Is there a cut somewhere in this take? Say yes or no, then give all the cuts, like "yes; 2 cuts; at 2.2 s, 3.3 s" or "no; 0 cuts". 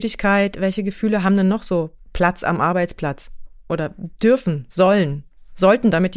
yes; 1 cut; at 2.0 s